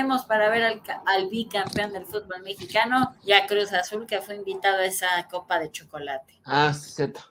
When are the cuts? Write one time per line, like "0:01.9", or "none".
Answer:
0:03.2
0:06.4